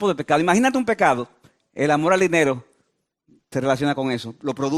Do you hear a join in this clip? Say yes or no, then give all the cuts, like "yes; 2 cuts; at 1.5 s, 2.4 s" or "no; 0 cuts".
no; 0 cuts